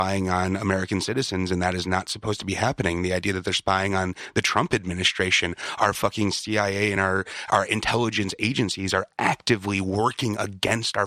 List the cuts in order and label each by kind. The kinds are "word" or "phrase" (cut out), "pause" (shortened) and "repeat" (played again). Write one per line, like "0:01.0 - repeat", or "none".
none